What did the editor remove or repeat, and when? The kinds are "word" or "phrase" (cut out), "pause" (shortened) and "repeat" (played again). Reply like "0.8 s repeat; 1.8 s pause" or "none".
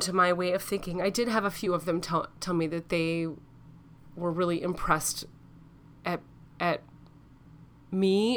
none

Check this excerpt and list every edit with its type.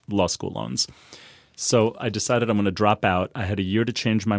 none

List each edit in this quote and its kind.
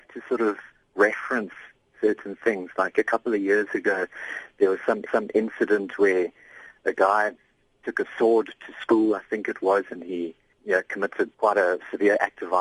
5.1 s repeat; 11.3 s pause

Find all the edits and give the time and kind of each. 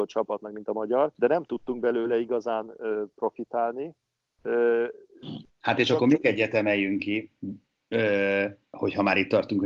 1.1 s pause; 5.5 s pause

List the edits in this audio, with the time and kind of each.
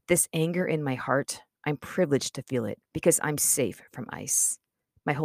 2.9 s pause

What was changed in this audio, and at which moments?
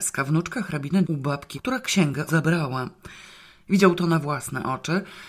1.0 s word; 1.5 s word; 2.3 s word

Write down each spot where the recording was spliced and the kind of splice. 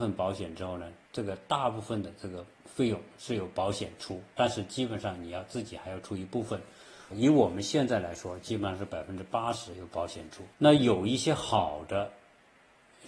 1.0 s pause; 2.5 s pause; 7.1 s word; 10.5 s pause

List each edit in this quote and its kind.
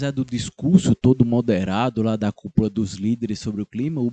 none

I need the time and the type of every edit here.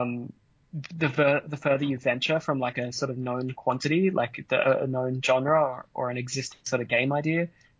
none

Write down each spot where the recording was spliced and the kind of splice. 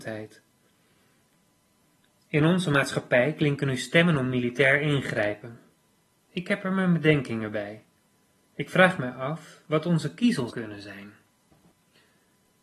10.5 s word

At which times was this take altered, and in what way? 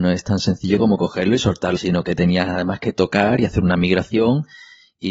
1.8 s word

